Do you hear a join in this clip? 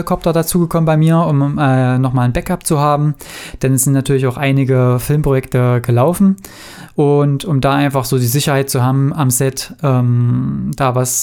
no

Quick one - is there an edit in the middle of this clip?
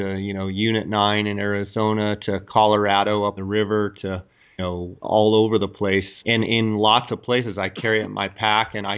yes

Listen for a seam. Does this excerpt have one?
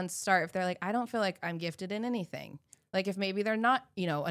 no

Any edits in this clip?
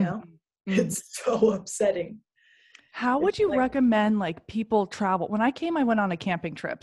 no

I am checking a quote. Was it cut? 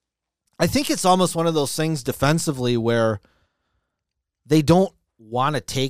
no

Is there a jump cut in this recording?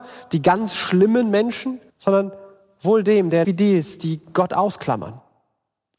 yes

